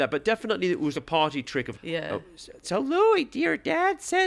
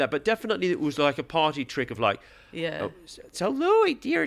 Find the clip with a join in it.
first; 2 cuts; at 0.9 s, 1.7 s

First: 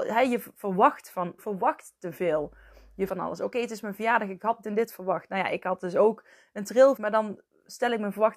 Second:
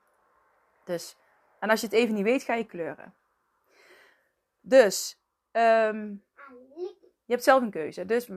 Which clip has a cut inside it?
first; 4 cuts; at 1.4 s, 3.1 s, 4.6 s, 7.0 s

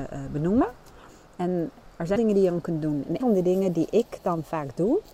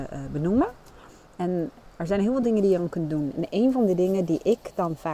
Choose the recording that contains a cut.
first; 2 cuts; at 2.2 s, 3.2 s

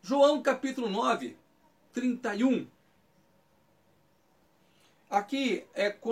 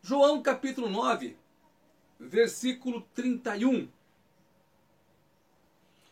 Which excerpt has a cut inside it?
first; 1 cut; at 1.9 s

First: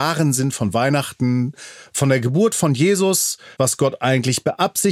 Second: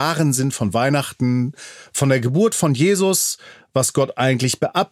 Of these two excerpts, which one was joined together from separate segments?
first; 1 cut; at 3.5 s

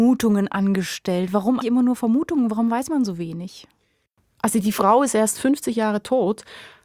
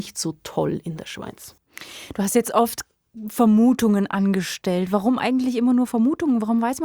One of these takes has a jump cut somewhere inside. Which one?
first; 1 cut; at 1.6 s

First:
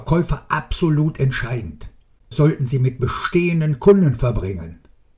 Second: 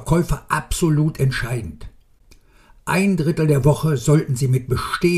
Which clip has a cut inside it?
first; 1 cut; at 2.3 s

